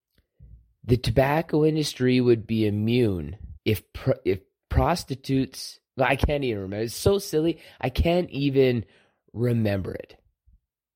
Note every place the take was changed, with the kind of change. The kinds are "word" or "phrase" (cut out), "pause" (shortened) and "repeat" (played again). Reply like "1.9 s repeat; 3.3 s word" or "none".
3.6 s pause; 5.9 s pause